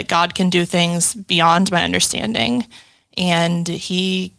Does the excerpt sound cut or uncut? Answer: uncut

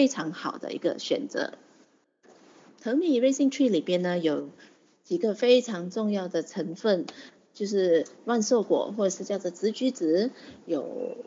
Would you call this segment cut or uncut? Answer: uncut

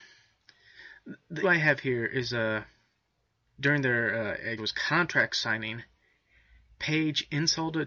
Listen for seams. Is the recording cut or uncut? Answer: cut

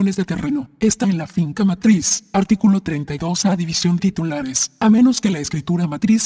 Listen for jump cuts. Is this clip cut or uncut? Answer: cut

